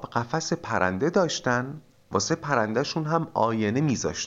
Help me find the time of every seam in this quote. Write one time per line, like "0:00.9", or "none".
0:01.9